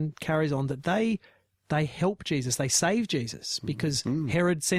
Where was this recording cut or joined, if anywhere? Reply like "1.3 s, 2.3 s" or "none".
none

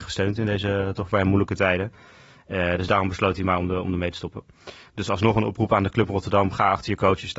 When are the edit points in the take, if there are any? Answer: none

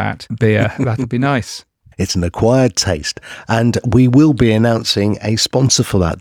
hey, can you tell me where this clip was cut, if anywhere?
none

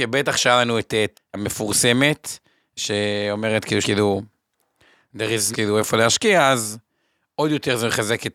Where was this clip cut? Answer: 1.1 s, 3.8 s, 5.5 s

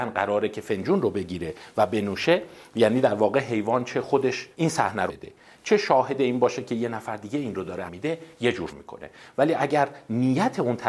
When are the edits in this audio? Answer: 4.5 s, 5.1 s, 7.9 s, 8.7 s

